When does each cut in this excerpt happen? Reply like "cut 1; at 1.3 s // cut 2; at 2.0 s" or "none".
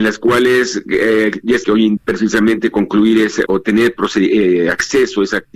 cut 1; at 1.6 s // cut 2; at 2.0 s // cut 3; at 3.5 s